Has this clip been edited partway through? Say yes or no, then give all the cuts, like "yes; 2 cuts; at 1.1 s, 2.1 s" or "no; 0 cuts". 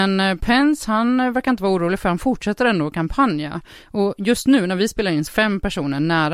yes; 1 cut; at 5.3 s